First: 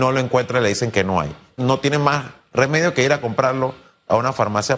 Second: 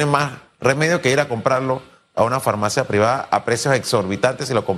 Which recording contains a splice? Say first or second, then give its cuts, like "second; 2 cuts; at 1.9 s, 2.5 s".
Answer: first; 1 cut; at 1.6 s